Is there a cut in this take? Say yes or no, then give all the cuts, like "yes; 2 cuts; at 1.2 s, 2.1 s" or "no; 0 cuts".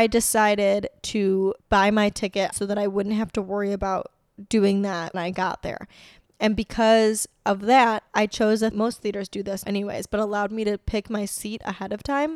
yes; 5 cuts; at 1.6 s, 2.5 s, 5.1 s, 8.7 s, 9.6 s